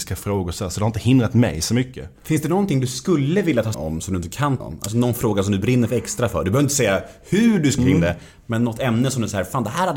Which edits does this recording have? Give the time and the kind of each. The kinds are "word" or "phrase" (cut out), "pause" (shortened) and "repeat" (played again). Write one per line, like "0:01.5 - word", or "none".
0:03.7 - word
0:04.6 - word
0:07.8 - phrase